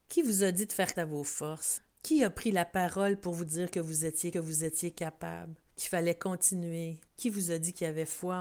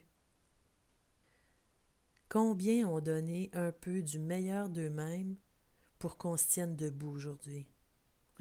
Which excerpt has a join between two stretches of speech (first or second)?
first